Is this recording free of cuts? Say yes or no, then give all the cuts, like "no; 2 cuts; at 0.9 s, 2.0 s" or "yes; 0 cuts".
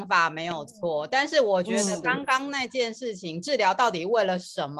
yes; 0 cuts